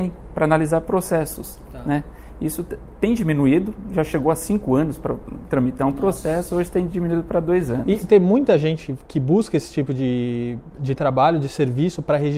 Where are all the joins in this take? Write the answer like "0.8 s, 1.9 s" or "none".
10.7 s